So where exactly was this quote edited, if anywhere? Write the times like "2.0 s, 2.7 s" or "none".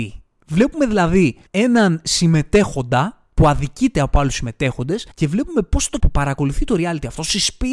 1.5 s, 5.1 s, 6.0 s